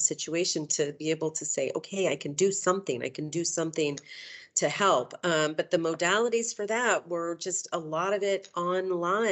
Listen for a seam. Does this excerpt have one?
no; 0 cuts

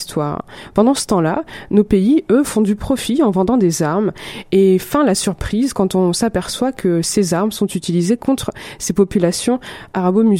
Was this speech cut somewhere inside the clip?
no; 0 cuts

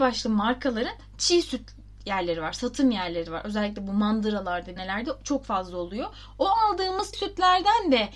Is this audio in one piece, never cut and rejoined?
no; 2 cuts; at 4.8 s, 7.1 s

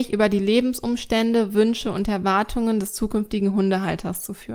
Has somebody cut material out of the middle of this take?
no; 0 cuts

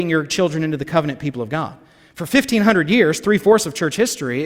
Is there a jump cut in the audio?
no; 0 cuts

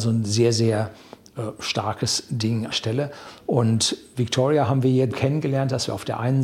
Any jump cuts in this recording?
yes; 2 cuts; at 2.7 s, 5.1 s

